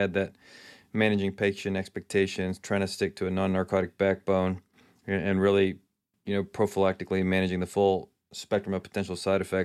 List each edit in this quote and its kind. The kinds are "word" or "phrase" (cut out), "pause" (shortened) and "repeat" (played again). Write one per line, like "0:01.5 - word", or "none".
none